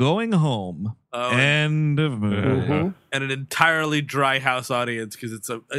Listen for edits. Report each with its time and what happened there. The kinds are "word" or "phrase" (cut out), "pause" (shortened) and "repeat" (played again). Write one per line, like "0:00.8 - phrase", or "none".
0:01.0 - pause